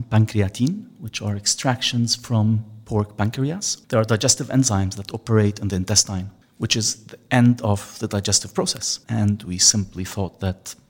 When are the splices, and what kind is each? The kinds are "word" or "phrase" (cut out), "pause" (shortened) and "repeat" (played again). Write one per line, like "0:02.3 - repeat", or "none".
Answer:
0:03.8 - pause
0:06.4 - pause
0:09.0 - pause